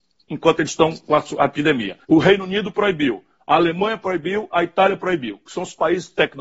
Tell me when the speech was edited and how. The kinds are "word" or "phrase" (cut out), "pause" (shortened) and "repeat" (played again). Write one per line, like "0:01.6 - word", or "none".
0:02.0 - pause